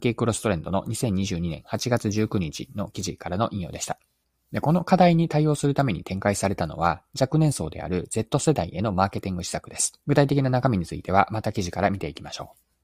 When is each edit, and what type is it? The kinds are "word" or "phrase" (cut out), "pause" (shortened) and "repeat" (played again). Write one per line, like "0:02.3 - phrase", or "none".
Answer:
0:04.2 - pause
0:10.0 - pause